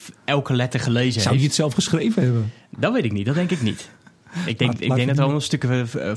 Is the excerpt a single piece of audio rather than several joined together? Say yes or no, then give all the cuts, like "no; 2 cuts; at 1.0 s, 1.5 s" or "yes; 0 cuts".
yes; 0 cuts